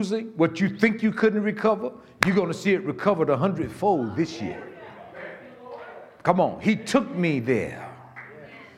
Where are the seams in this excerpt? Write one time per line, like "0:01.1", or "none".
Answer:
none